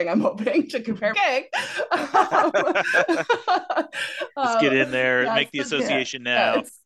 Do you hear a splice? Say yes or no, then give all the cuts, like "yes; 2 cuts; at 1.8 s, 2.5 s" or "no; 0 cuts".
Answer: yes; 1 cut; at 1.1 s